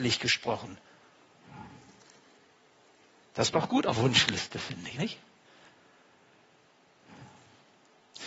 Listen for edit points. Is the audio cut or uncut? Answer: cut